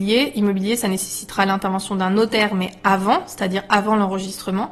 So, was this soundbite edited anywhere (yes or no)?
no